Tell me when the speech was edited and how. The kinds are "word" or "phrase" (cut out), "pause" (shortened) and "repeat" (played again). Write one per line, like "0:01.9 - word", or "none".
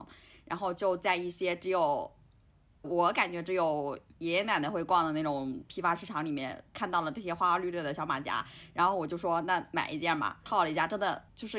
0:02.8 - word